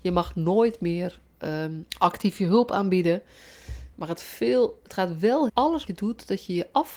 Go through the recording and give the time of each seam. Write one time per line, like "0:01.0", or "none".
0:01.9
0:04.2
0:05.5
0:05.9